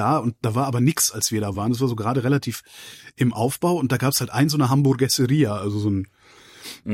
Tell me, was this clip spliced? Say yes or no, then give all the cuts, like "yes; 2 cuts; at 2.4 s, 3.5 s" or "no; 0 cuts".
no; 0 cuts